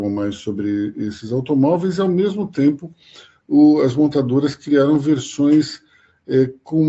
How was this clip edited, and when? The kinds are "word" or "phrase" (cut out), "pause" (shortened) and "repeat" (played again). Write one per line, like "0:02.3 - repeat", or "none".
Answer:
none